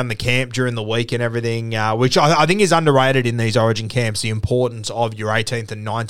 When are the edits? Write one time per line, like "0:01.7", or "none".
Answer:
none